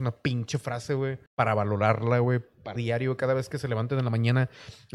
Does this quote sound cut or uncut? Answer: cut